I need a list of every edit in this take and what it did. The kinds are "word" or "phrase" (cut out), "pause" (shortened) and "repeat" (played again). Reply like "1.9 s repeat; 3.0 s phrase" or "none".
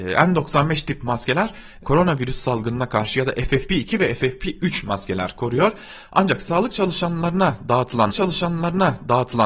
1.8 s word; 8.1 s repeat